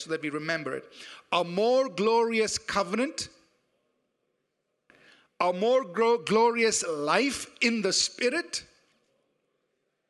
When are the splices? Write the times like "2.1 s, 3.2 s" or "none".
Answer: none